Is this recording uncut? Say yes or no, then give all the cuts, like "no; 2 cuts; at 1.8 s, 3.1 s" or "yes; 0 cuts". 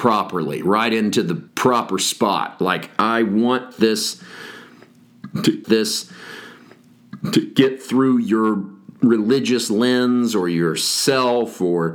no; 2 cuts; at 1.5 s, 5.6 s